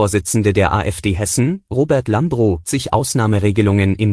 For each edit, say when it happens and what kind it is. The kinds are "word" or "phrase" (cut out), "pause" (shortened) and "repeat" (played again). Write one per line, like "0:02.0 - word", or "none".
0:02.6 - word